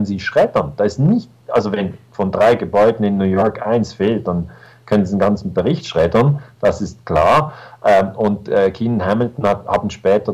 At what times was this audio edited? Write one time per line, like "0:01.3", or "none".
none